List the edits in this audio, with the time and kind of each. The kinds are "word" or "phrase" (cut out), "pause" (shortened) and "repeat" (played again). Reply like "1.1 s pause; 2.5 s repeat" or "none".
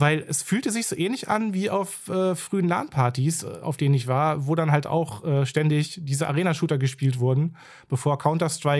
none